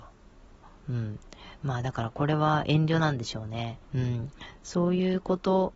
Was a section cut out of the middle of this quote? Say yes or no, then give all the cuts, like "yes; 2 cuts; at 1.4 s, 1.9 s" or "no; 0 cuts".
yes; 1 cut; at 3.8 s